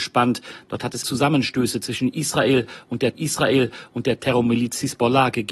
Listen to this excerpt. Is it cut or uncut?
cut